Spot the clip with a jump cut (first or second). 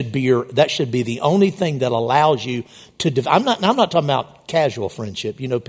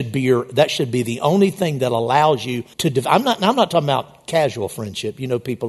second